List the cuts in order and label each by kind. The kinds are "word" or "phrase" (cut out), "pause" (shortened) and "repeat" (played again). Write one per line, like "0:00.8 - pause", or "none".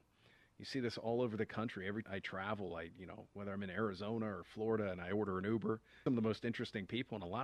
0:02.0 - phrase
0:06.1 - phrase